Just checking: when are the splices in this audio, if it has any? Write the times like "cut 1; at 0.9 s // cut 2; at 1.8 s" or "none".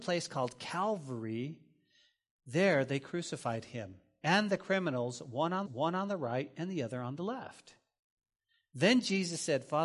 cut 1; at 5.7 s